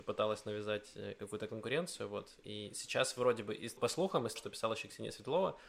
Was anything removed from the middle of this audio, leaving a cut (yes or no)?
yes